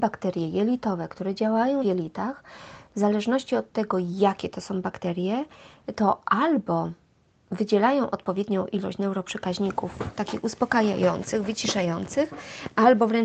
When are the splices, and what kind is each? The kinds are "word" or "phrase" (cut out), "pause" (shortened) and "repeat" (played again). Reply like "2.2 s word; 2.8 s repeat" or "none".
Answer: 1.8 s word